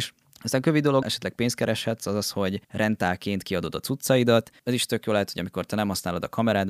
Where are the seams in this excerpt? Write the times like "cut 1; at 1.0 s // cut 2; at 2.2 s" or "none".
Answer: cut 1; at 1.0 s // cut 2; at 2.6 s